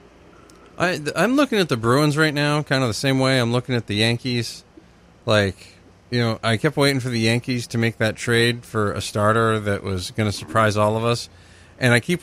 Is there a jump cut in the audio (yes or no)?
no